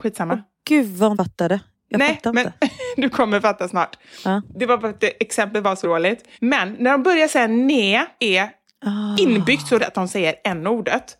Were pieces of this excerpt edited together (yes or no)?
yes